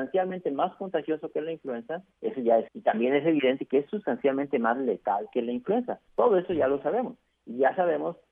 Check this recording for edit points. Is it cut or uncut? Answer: cut